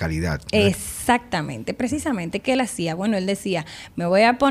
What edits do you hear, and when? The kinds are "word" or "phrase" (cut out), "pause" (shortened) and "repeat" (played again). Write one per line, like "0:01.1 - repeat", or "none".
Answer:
none